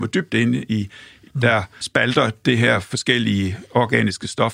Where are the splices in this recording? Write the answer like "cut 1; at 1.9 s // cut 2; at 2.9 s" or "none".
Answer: cut 1; at 1.3 s // cut 2; at 1.8 s